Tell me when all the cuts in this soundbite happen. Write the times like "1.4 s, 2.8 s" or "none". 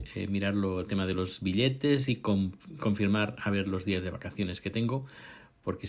none